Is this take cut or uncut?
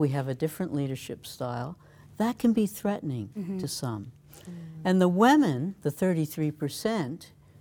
uncut